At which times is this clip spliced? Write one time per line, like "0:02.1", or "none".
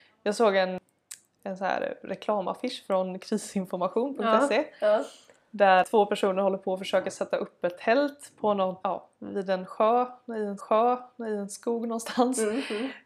0:08.8
0:10.6